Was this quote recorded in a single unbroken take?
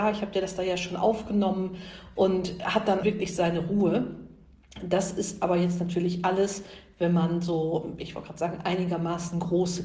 no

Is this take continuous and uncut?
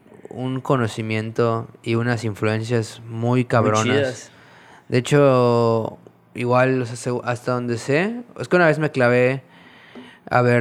yes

